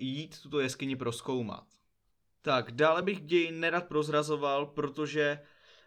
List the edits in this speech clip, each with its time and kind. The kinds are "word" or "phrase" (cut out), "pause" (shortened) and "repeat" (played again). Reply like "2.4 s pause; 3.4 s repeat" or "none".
none

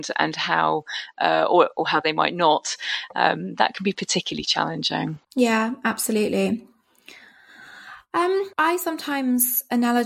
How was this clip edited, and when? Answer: 5.2 s pause; 8.5 s pause

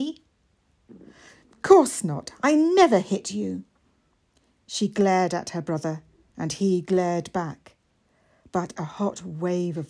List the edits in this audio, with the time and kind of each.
none

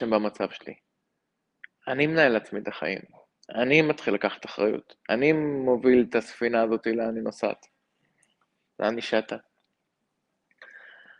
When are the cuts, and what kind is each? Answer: none

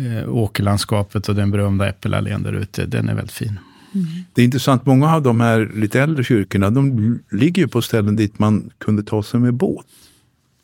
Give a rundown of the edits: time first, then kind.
none

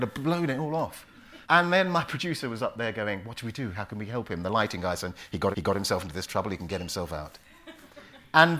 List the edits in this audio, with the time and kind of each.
1.4 s pause; 5.5 s repeat

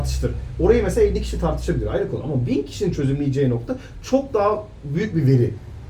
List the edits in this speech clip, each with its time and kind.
none

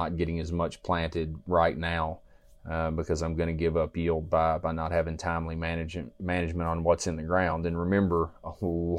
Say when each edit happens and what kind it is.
none

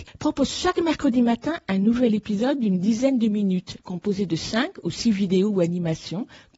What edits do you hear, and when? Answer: 3.8 s pause

